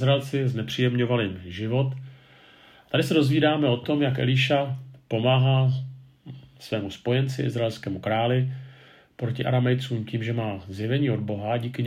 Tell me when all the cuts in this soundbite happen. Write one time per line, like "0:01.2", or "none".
none